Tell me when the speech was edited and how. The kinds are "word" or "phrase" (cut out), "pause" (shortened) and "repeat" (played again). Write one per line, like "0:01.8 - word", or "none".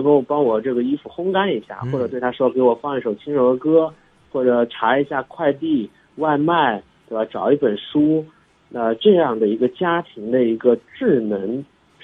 none